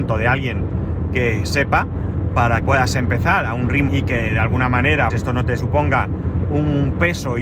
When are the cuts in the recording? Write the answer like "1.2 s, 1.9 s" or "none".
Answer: 2.6 s, 3.9 s, 5.1 s, 5.6 s